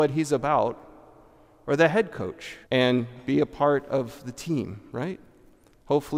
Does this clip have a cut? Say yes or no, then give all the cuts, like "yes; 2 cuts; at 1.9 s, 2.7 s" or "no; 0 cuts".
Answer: yes; 1 cut; at 2.6 s